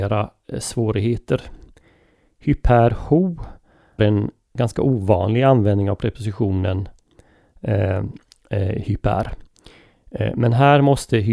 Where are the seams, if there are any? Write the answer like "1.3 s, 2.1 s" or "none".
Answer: 4.0 s